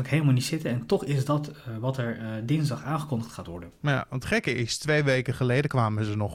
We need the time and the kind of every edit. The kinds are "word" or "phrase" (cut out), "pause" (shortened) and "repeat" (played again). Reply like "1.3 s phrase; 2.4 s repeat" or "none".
none